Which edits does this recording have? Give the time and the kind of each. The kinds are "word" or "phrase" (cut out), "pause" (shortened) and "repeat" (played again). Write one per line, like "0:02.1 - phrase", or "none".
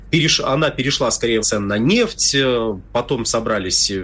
0:01.4 - phrase